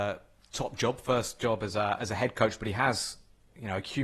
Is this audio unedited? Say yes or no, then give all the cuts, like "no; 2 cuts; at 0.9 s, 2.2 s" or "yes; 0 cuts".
yes; 0 cuts